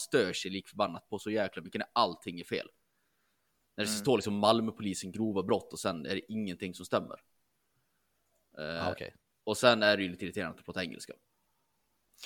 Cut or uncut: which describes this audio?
uncut